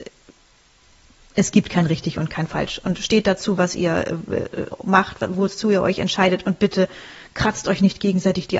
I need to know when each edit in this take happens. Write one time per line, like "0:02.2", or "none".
none